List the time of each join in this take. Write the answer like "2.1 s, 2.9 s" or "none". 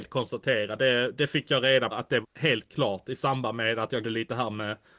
1.9 s, 2.2 s, 4.0 s